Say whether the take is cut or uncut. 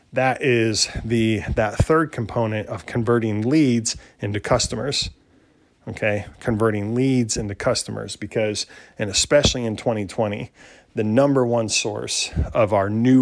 uncut